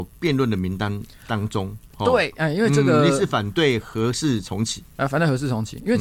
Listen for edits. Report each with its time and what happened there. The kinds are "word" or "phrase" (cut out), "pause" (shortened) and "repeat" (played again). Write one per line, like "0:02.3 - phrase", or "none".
none